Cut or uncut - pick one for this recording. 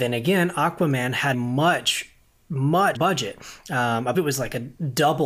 cut